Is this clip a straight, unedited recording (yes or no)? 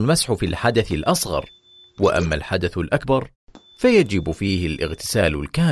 yes